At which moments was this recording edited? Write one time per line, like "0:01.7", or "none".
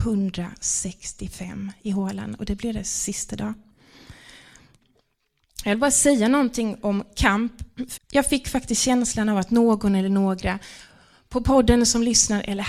0:08.0